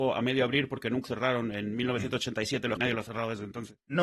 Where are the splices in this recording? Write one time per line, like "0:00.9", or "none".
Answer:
0:01.0
0:02.8